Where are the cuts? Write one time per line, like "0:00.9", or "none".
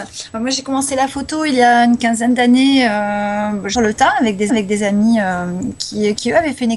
0:03.7
0:04.5